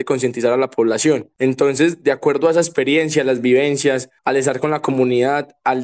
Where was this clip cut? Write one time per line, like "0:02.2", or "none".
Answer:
0:01.4
0:04.2